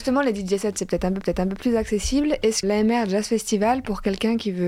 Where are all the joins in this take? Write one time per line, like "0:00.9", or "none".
0:01.2
0:02.6